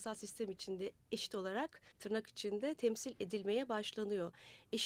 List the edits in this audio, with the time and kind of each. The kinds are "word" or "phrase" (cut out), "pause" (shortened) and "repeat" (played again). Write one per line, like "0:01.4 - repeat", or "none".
0:01.9 - pause